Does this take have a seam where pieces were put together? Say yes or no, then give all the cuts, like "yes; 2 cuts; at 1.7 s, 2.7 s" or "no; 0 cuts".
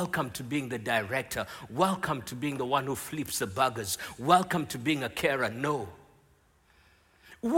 no; 0 cuts